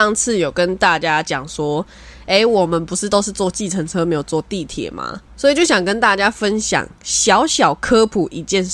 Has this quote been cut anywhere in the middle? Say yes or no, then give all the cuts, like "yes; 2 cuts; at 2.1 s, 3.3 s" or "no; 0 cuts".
yes; 1 cut; at 5.3 s